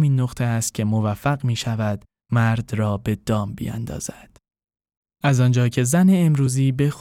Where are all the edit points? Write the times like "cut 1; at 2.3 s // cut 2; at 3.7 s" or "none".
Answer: none